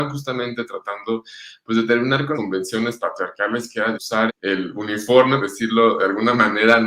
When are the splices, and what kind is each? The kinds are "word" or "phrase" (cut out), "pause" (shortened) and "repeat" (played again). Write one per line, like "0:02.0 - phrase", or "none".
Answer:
0:02.3 - word
0:03.9 - word
0:04.3 - word
0:05.4 - word

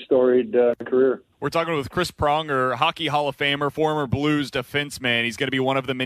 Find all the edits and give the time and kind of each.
0:01.3 - pause

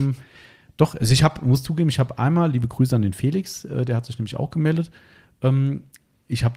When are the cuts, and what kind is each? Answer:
none

